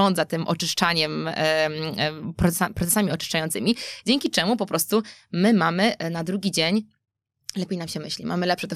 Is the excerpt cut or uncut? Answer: uncut